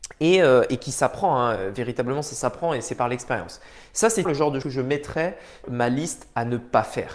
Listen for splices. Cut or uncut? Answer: cut